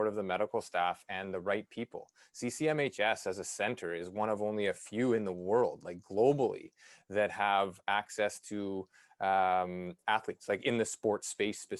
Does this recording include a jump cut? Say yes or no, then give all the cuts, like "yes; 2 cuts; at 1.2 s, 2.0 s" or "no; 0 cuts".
no; 0 cuts